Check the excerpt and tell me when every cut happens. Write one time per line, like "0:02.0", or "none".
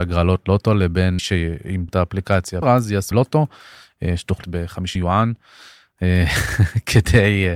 0:01.2
0:01.9
0:02.6
0:03.1
0:04.4
0:05.0